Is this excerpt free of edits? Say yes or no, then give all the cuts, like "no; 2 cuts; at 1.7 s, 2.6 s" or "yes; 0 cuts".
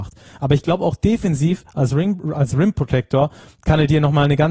yes; 0 cuts